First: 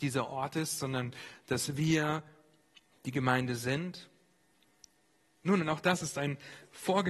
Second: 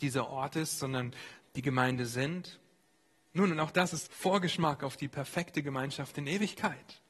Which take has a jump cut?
second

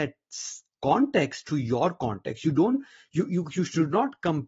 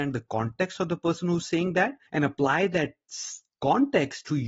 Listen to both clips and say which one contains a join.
second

